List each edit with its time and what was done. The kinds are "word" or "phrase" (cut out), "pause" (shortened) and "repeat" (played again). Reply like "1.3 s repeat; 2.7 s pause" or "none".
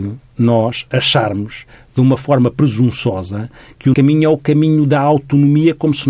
3.9 s word